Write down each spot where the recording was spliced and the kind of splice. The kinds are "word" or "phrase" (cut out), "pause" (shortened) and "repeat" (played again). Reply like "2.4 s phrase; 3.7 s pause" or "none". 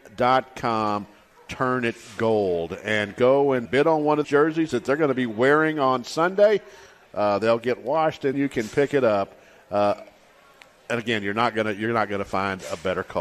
3.6 s word; 4.2 s word; 8.3 s word